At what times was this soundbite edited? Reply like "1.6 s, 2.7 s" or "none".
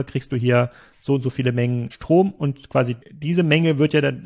1.9 s, 3.0 s